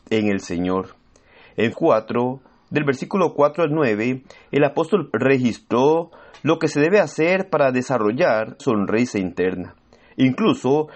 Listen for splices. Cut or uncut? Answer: cut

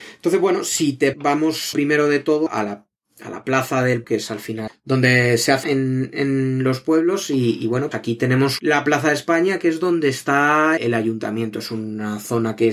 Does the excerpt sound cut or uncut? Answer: cut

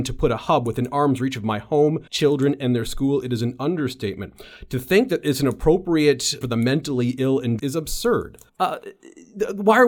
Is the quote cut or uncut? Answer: cut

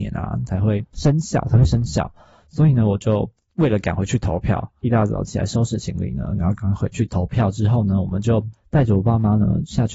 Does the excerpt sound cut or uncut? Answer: uncut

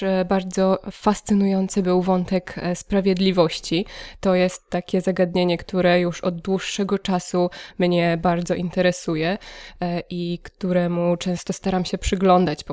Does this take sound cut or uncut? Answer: uncut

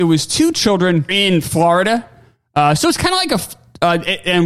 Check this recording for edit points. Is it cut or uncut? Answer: cut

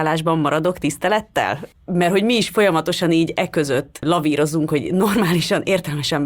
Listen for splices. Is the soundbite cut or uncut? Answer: uncut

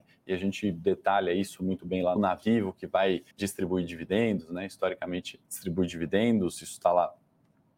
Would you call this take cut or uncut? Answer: cut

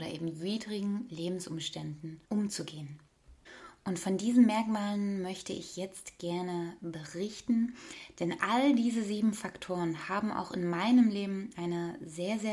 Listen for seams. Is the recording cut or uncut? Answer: cut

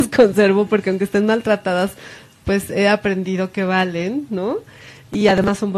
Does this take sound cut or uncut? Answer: uncut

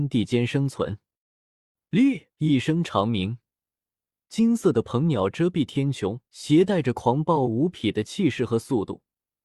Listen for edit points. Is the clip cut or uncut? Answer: cut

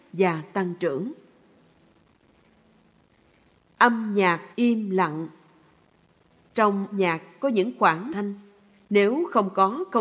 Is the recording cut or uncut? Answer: cut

